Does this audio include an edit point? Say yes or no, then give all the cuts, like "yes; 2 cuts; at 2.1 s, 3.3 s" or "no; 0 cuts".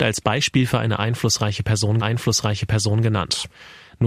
yes; 1 cut; at 2.0 s